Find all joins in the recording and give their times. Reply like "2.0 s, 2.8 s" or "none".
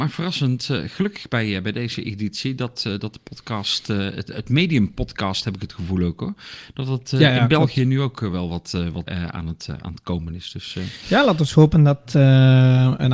9.1 s